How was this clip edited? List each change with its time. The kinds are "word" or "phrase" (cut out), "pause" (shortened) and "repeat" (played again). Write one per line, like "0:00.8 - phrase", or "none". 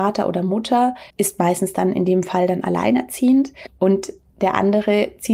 0:01.1 - pause